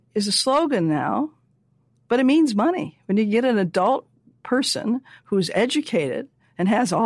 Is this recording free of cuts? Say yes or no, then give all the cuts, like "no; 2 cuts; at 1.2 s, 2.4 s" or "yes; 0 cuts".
yes; 0 cuts